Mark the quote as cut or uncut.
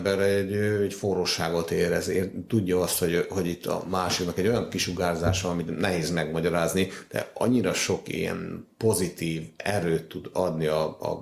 uncut